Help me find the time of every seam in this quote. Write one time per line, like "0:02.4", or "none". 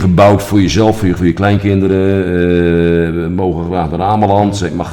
0:01.2